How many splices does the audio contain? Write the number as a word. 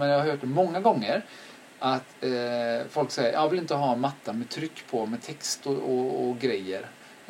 one